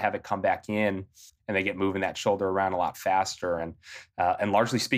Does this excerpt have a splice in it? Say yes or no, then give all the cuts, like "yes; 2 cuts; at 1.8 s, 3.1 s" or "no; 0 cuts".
no; 0 cuts